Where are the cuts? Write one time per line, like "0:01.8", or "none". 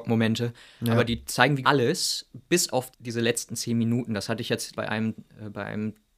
0:01.1
0:01.6
0:02.9
0:04.7